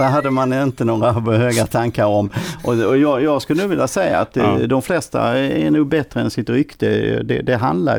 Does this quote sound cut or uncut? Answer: uncut